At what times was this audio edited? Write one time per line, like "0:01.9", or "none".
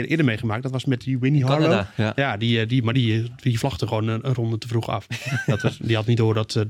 none